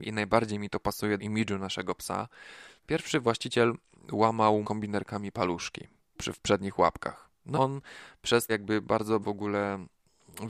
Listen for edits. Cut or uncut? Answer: cut